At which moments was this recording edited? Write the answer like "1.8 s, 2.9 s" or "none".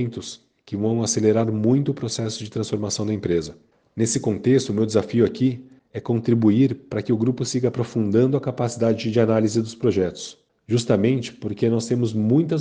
none